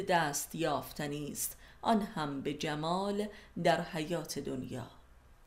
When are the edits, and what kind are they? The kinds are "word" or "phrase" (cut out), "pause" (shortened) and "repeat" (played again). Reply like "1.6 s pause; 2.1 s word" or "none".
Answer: none